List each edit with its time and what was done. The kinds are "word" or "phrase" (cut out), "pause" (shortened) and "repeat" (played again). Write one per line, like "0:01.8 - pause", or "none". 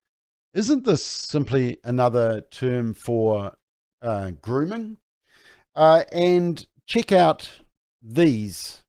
none

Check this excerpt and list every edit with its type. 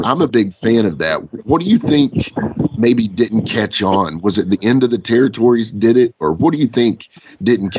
none

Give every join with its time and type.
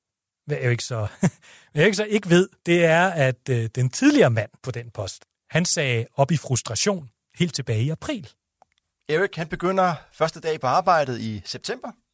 0:02.6 - pause
0:04.6 - pause
0:08.8 - pause

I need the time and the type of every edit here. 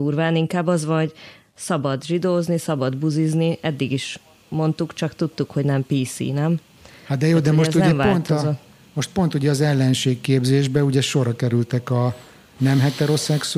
none

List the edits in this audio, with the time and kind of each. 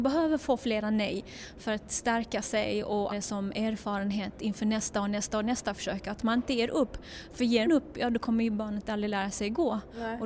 0:03.1 - word
0:07.7 - word

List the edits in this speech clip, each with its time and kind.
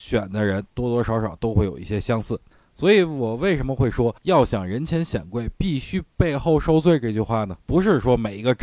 0:02.5 - pause
0:04.2 - pause
0:07.6 - pause

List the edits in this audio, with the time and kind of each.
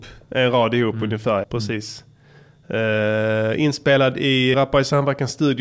0:01.4 - word
0:04.5 - word

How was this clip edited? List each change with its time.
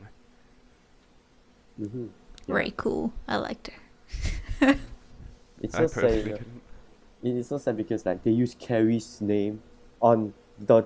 none

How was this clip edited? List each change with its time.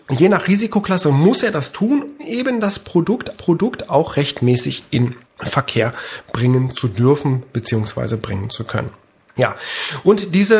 0:02.2 - word
0:03.3 - repeat
0:05.3 - pause

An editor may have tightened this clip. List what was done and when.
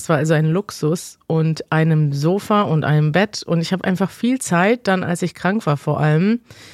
none

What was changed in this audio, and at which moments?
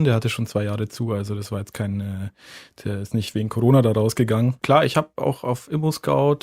0:04.6 - pause

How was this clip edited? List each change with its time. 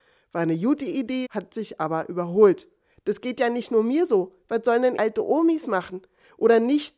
0:01.2 - word
0:05.0 - word

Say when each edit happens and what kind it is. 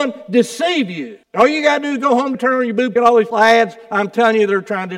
0:01.2 - pause
0:02.3 - word
0:03.0 - phrase
0:03.3 - word

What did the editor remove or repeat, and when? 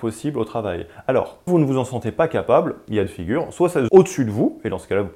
0:01.5 - word
0:03.1 - phrase
0:03.9 - word

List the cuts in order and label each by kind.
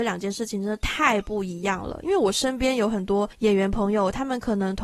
0:03.3 - pause

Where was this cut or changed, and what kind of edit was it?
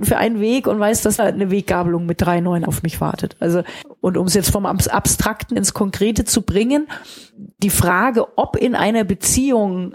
0:01.2 - phrase
0:02.7 - word
0:05.6 - word
0:07.5 - pause

